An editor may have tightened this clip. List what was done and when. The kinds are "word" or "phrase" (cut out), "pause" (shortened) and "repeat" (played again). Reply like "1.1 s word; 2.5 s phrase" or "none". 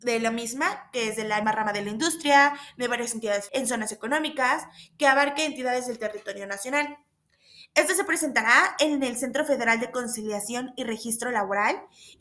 1.4 s word; 3.5 s word